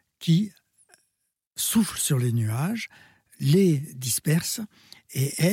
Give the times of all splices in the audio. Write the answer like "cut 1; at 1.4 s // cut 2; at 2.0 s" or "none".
none